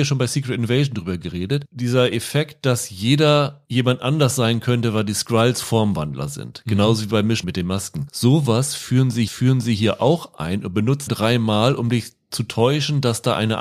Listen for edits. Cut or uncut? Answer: cut